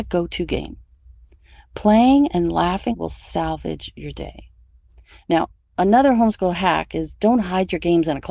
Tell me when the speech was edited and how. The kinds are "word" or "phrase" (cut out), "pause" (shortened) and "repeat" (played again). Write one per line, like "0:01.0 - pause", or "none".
0:02.9 - phrase